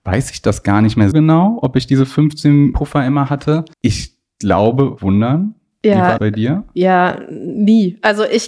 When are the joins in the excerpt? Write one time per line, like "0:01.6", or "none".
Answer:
0:01.1
0:02.7
0:03.7
0:05.0
0:06.2